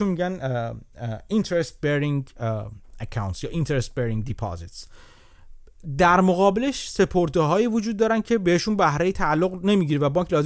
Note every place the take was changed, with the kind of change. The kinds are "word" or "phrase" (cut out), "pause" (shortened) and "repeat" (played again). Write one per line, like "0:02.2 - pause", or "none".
none